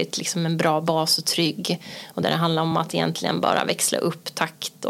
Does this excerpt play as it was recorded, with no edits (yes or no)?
yes